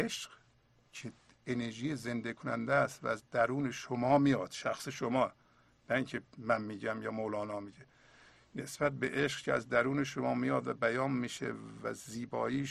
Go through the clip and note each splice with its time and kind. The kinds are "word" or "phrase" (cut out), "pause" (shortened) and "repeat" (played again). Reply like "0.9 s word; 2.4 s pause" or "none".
none